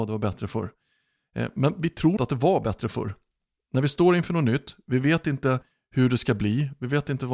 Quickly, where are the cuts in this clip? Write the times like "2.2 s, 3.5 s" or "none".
2.2 s